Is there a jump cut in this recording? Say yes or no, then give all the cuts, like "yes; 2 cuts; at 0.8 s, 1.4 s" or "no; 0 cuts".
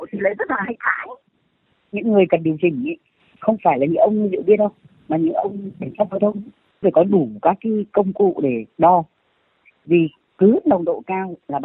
no; 0 cuts